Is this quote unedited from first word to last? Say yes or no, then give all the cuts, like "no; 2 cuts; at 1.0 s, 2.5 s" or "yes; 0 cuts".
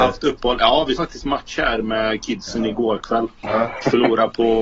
no; 2 cuts; at 1.0 s, 3.4 s